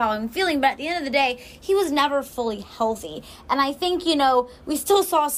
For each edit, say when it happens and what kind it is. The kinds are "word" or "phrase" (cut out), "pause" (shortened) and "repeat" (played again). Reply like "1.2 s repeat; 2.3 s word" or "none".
none